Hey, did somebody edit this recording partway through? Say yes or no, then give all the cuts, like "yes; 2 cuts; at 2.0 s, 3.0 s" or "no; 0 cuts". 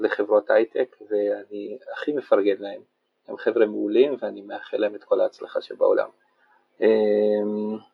no; 0 cuts